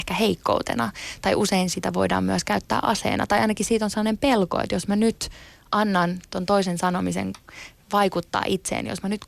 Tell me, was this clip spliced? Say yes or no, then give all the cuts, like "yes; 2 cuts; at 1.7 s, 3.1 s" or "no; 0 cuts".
no; 0 cuts